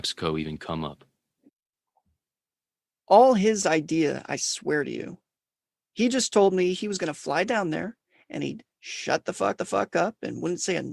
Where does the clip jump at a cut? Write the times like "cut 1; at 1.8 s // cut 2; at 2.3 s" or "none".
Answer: cut 1; at 9.6 s